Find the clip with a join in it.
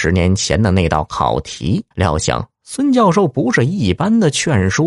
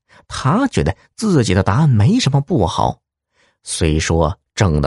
first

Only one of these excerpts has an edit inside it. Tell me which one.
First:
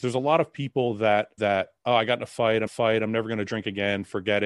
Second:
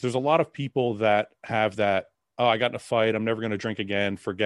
first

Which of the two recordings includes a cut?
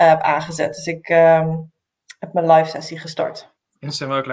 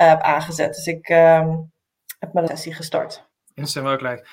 second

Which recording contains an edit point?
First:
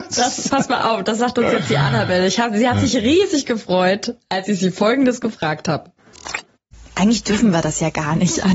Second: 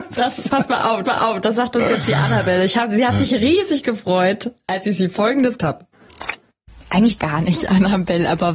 second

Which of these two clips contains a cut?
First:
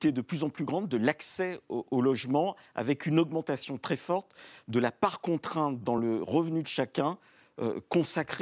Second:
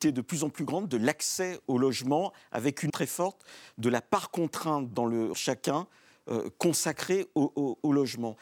second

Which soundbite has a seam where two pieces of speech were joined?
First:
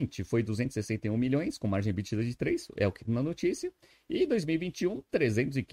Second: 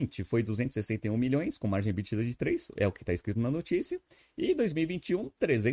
first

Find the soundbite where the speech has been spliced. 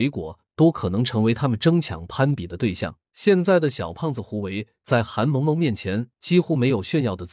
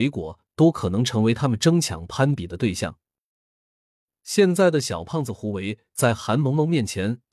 first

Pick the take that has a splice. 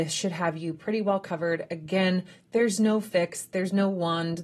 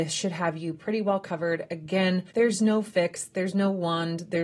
second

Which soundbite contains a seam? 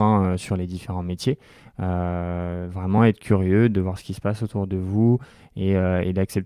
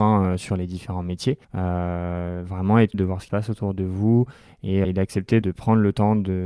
second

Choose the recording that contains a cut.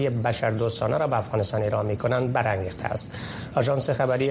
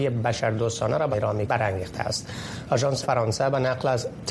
second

